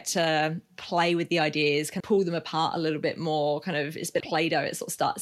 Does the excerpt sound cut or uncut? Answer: cut